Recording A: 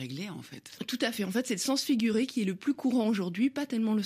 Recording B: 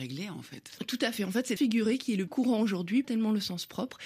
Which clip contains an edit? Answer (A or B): B